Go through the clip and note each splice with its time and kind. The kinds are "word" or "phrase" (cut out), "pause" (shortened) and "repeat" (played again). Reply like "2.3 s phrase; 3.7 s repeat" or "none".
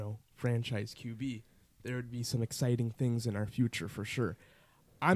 none